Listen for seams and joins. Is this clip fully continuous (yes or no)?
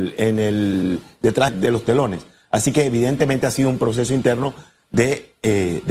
no